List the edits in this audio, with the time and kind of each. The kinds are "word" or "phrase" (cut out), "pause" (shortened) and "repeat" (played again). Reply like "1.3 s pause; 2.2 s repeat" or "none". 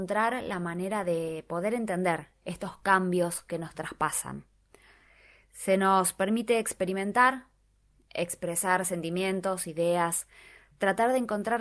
none